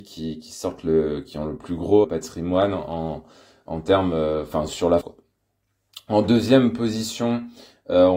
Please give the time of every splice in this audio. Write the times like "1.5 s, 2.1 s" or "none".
2.0 s, 4.7 s, 5.0 s